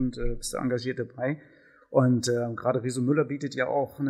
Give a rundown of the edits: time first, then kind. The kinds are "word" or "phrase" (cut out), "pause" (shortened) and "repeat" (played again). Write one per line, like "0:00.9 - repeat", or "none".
none